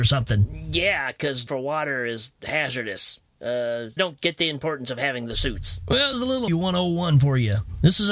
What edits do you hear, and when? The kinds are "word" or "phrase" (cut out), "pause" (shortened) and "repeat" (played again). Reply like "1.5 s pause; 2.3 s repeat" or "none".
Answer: 1.5 s word; 4.0 s word; 6.1 s word; 6.5 s word